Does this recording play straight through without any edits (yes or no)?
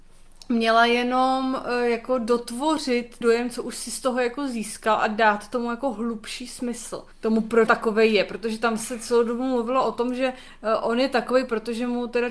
no